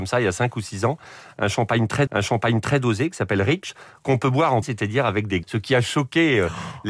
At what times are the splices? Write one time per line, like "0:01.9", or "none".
0:02.1
0:04.6
0:05.4